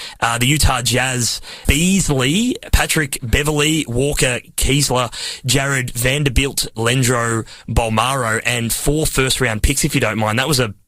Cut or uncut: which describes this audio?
cut